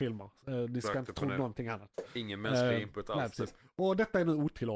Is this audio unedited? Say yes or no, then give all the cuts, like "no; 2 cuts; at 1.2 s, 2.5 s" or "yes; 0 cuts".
yes; 0 cuts